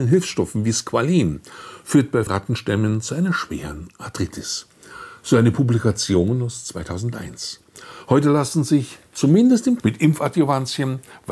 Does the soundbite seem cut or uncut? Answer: cut